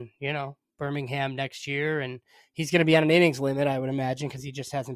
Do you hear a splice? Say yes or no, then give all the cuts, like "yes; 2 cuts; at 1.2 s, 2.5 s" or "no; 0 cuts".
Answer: no; 0 cuts